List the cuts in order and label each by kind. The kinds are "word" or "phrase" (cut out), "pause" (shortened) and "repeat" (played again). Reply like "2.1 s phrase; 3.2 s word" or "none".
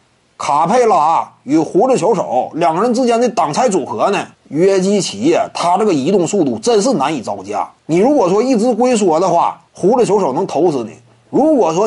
4.3 s pause; 7.8 s pause; 9.7 s pause